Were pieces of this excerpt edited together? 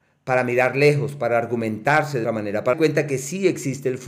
yes; 2 cuts; at 2.2 s, 2.7 s

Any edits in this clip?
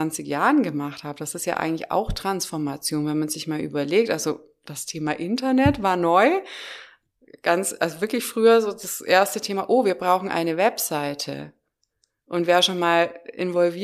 no; 0 cuts

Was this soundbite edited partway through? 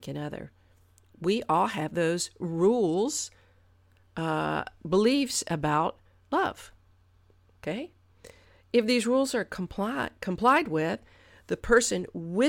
no; 0 cuts

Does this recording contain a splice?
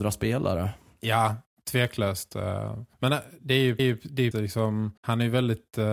yes; 4 cuts; at 2.9 s, 3.8 s, 4.3 s, 5.0 s

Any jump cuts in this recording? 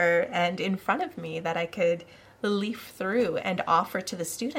no; 0 cuts

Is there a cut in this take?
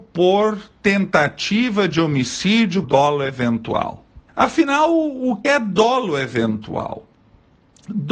yes; 3 cuts; at 2.8 s, 4.3 s, 5.4 s

